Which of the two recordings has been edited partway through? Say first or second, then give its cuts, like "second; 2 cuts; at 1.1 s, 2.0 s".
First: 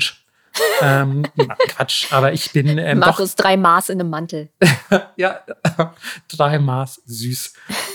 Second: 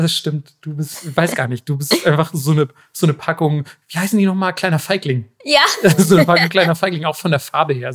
first; 1 cut; at 1.7 s